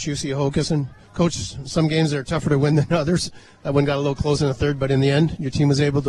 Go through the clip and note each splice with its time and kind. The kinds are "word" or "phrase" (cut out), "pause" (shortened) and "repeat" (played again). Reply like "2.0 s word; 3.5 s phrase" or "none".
1.0 s pause